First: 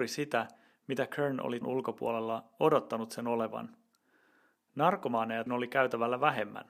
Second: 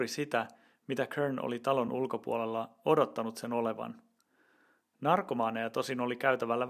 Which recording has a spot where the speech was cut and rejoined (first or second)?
first